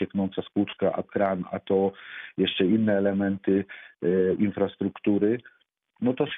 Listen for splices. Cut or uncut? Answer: cut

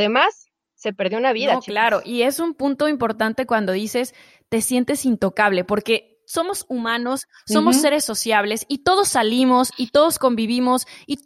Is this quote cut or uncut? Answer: uncut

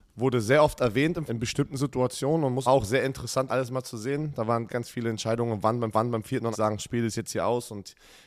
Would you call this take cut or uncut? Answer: cut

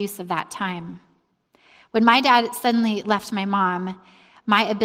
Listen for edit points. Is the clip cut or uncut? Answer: uncut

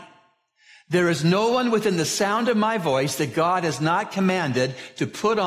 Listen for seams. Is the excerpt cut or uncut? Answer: uncut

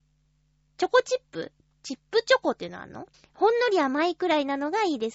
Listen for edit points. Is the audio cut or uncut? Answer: cut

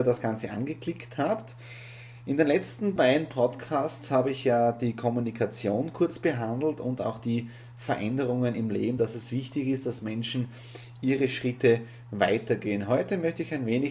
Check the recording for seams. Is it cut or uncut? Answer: uncut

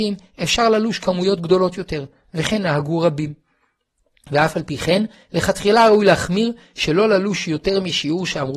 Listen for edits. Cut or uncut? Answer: uncut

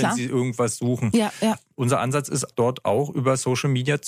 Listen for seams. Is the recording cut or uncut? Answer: cut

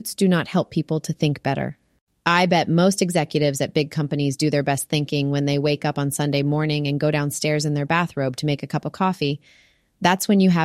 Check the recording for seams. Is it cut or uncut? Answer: uncut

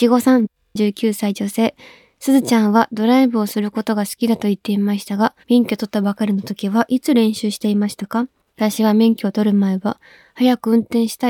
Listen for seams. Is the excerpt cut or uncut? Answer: cut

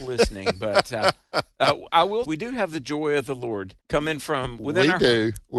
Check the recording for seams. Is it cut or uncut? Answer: cut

